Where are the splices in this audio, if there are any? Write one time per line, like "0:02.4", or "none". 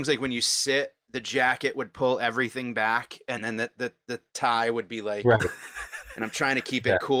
none